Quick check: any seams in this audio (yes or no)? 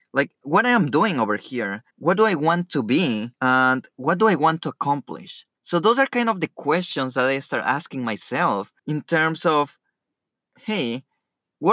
yes